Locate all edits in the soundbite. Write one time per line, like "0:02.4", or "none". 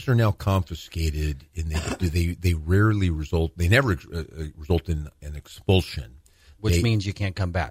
none